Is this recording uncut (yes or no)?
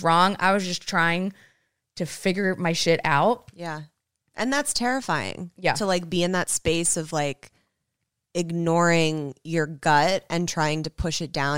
yes